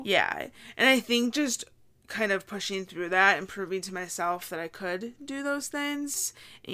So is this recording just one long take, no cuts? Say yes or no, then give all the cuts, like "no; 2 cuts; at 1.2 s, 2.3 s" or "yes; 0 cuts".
yes; 0 cuts